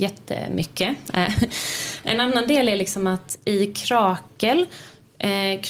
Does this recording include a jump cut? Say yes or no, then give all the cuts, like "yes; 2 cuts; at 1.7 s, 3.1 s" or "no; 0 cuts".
no; 0 cuts